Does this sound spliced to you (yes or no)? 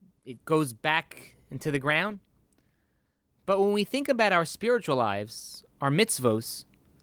no